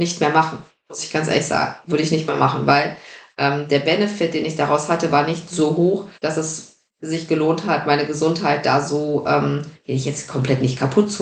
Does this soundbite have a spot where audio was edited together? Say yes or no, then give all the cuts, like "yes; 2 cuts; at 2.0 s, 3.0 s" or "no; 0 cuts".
yes; 2 cuts; at 6.2 s, 6.9 s